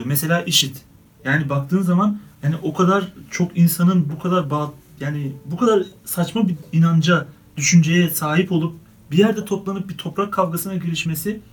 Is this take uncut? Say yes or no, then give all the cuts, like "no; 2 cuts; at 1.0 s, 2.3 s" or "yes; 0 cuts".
yes; 0 cuts